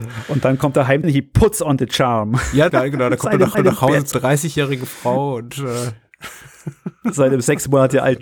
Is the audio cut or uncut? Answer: cut